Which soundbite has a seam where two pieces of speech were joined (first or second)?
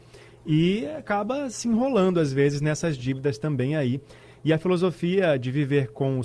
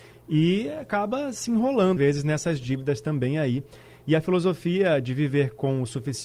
second